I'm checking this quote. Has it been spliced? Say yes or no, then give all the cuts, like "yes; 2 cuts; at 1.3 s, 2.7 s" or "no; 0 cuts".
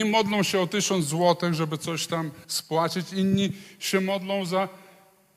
yes; 1 cut; at 2.4 s